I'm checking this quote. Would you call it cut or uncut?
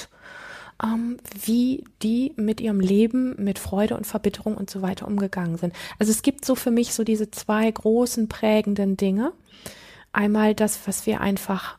uncut